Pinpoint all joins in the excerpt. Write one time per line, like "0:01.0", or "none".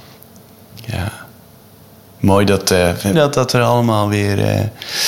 0:03.1